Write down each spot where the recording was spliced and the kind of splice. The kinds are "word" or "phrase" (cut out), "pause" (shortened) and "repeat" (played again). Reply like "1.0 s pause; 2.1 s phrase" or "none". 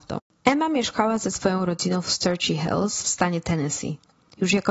none